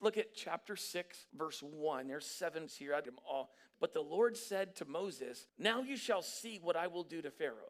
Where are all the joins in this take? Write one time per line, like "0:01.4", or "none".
0:01.3
0:02.7
0:03.0
0:03.7
0:05.5